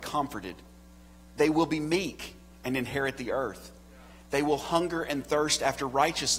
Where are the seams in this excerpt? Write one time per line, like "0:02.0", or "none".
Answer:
none